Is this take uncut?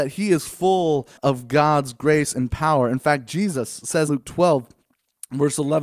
no; 2 cuts; at 1.2 s, 4.1 s

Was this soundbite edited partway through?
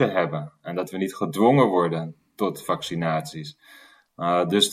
no; 0 cuts

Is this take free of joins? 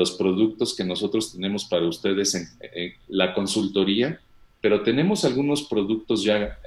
yes; 0 cuts

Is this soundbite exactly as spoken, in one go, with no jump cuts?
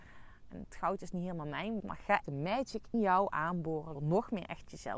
no; 4 cuts; at 1.8 s, 2.2 s, 2.9 s, 3.9 s

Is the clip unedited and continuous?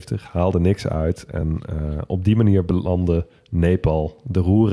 yes; 0 cuts

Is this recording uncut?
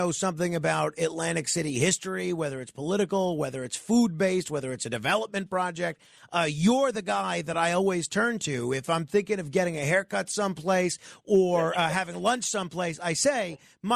yes; 0 cuts

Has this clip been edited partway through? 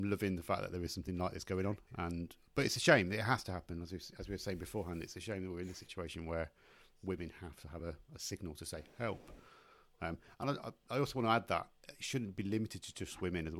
no; 0 cuts

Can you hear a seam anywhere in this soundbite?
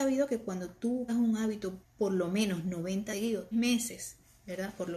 yes; 4 cuts; at 1.1 s, 1.8 s, 3.1 s, 3.5 s

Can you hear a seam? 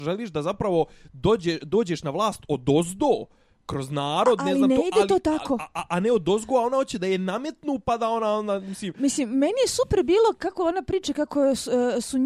no; 0 cuts

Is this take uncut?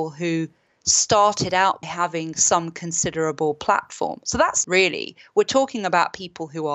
no; 2 cuts; at 1.8 s, 4.6 s

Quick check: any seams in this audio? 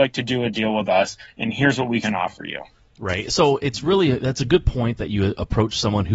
no; 0 cuts

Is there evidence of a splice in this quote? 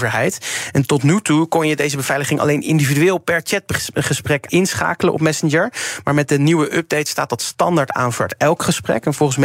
yes; 1 cut; at 4.5 s

